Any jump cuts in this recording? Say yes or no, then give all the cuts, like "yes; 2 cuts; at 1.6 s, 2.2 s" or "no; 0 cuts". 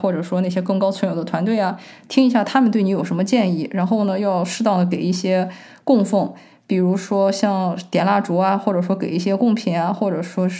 no; 0 cuts